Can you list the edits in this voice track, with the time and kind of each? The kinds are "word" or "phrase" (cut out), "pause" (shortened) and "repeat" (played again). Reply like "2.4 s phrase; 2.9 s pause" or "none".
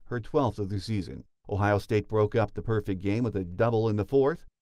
none

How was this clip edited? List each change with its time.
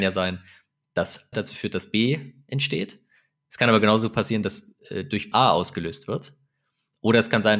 1.3 s word; 5.3 s word

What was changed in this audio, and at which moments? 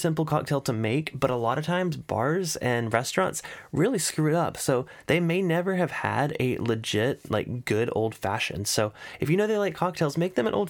none

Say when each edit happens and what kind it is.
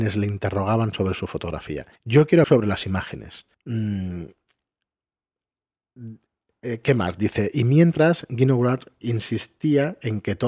2.0 s pause; 2.4 s word; 3.5 s pause

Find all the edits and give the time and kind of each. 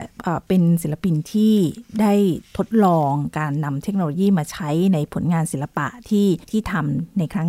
6.4 s pause

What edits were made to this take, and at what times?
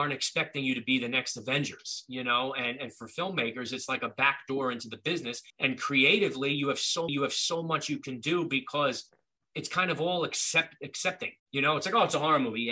5.5 s pause; 7.1 s repeat; 11.4 s pause

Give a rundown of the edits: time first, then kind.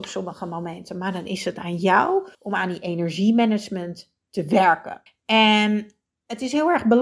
2.3 s pause; 5.1 s pause

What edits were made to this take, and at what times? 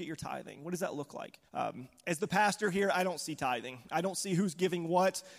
1.5 s pause

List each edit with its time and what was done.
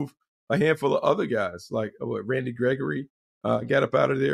none

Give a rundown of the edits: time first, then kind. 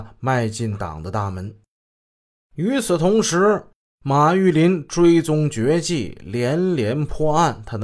none

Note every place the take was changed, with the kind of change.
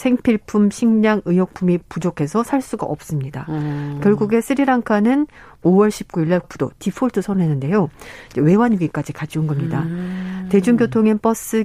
6.4 s word

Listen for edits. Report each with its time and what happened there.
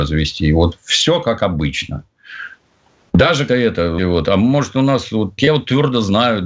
3.5 s word; 4.0 s word; 5.4 s word

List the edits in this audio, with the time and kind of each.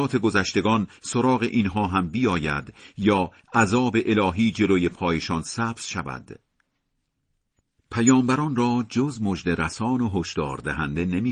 none

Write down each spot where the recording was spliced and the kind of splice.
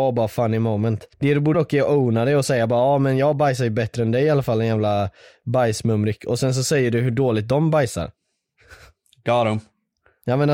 1.1 s pause; 1.5 s word

